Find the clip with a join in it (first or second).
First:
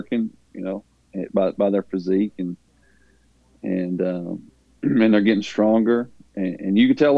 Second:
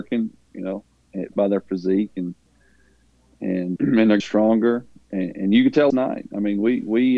second